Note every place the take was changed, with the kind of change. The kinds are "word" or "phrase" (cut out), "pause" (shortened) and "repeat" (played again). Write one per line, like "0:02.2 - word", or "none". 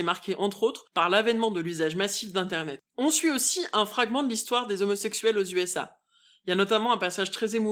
0:02.9 - pause